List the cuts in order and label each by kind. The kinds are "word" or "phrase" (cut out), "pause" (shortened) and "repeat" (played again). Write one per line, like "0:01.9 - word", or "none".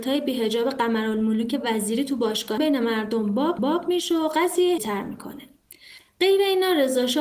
0:02.6 - word
0:03.6 - repeat
0:04.8 - phrase

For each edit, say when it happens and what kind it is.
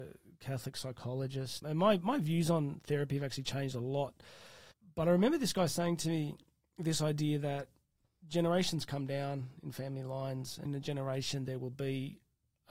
0:01.6 - word
0:04.7 - pause
0:10.7 - phrase

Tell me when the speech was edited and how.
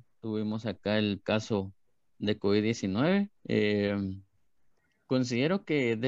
0:01.2 - word
0:03.4 - pause

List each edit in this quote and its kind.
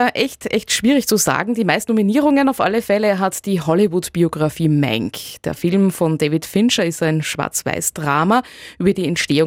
none

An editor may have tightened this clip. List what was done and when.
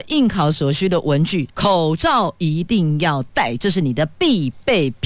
0:01.5 - pause

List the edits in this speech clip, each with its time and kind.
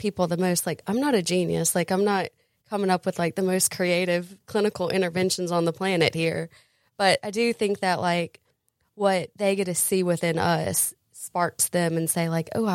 none

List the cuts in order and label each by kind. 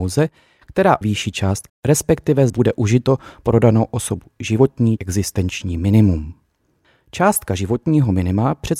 0:01.0 - word
0:01.7 - word
0:02.5 - word
0:05.0 - word

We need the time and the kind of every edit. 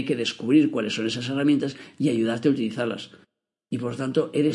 none

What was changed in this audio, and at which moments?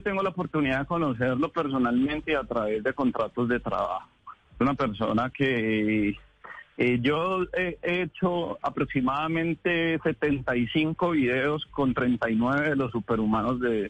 0:04.4 - pause

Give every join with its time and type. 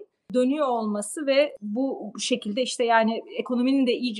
none

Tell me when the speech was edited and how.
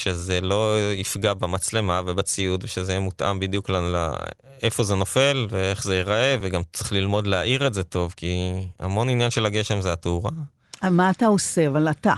none

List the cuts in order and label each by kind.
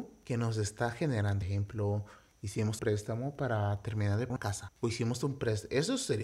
0:01.4 - phrase
0:02.8 - word
0:04.3 - word
0:04.8 - pause

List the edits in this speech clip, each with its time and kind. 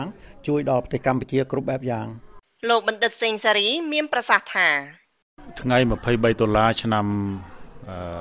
none

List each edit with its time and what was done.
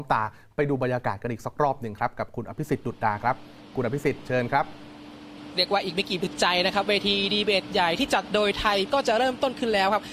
0:08.9 - word

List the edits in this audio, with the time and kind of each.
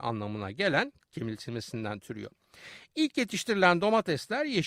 0:01.0 - word

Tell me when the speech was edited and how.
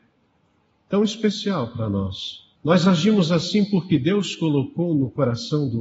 0:02.5 - pause

